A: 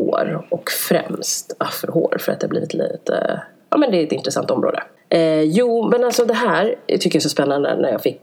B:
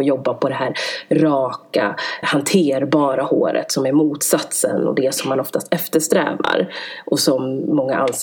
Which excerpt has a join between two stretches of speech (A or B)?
B